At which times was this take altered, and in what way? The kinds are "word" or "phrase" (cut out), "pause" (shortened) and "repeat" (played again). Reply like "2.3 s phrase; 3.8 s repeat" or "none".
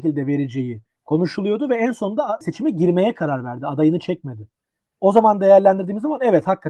none